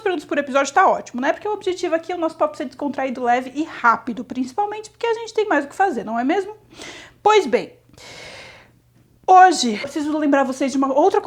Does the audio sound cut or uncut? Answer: cut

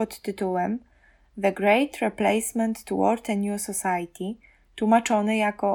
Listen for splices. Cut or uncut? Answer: uncut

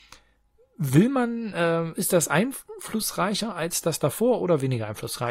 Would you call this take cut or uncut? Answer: uncut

